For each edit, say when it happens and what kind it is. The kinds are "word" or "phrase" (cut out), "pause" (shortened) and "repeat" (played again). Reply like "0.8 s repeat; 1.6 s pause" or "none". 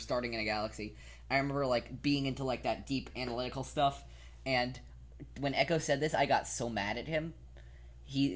none